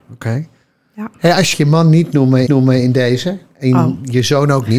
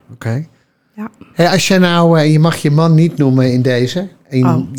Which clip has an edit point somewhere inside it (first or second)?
first